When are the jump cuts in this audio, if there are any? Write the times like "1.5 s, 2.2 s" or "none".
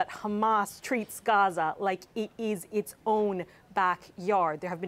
none